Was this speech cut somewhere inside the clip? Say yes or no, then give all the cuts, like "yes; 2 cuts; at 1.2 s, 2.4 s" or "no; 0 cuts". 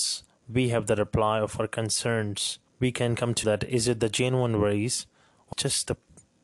yes; 3 cuts; at 2.7 s, 3.4 s, 5.5 s